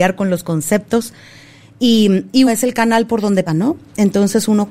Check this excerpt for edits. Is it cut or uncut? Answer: cut